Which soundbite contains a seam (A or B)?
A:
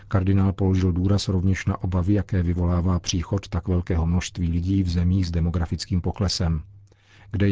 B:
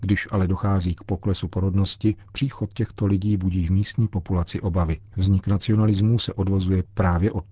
B